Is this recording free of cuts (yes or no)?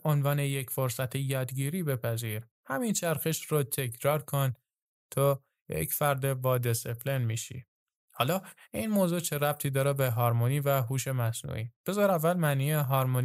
yes